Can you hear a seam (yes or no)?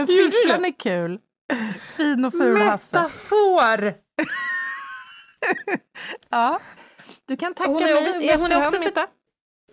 no